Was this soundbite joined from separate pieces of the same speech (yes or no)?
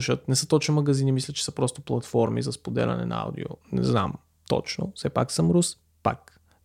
yes